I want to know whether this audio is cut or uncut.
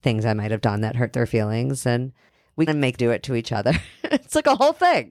cut